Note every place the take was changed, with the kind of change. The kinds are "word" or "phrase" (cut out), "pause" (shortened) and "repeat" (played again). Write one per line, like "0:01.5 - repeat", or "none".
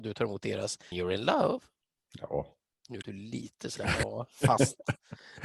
0:00.9 - word
0:03.0 - word